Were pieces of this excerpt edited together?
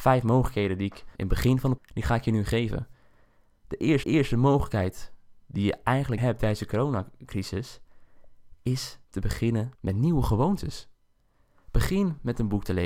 yes; 6 cuts; at 1.1 s, 1.8 s, 4.0 s, 6.2 s, 9.0 s, 9.7 s

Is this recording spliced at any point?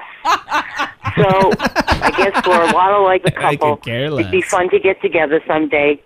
yes; 1 cut; at 3.2 s

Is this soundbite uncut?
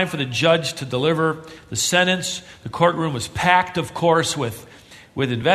yes; 0 cuts

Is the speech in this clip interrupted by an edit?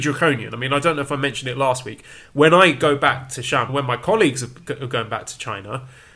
yes; 1 cut; at 3.7 s

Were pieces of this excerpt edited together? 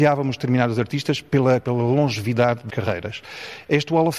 yes; 2 cuts; at 1.6 s, 2.7 s

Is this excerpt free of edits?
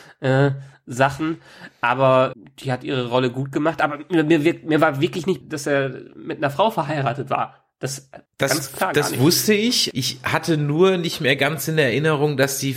no; 3 cuts; at 2.3 s, 5.4 s, 8.2 s

